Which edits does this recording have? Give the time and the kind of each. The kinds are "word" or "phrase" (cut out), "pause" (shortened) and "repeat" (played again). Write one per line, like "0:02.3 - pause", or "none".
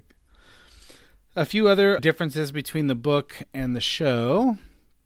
0:02.0 - word